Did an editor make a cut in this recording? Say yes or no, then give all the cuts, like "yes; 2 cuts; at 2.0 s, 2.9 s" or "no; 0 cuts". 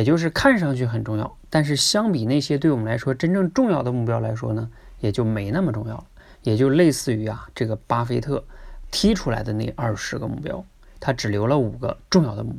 no; 0 cuts